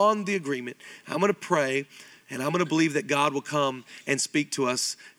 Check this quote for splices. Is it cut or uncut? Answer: uncut